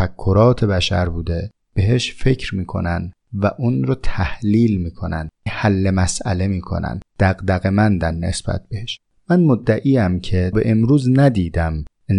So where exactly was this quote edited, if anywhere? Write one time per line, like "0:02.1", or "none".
0:05.5
0:10.5